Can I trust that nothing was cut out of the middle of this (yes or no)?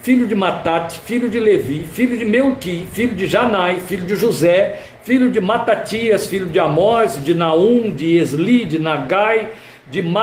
yes